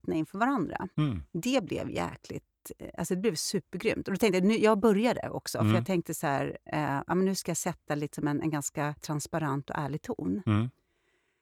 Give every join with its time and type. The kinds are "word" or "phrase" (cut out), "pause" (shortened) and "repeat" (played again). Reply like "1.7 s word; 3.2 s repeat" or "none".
0.9 s pause